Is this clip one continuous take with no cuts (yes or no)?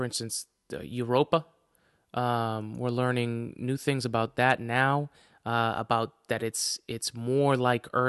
yes